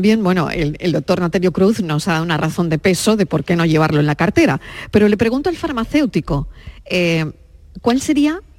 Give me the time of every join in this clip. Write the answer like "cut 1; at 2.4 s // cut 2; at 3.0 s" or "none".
none